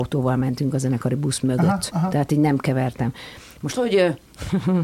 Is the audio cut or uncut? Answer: cut